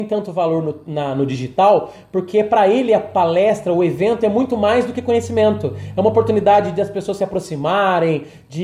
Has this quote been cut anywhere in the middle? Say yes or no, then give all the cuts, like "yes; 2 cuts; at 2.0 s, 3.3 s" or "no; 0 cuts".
no; 0 cuts